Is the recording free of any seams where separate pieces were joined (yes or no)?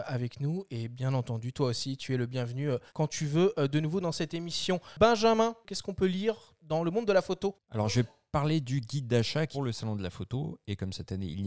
no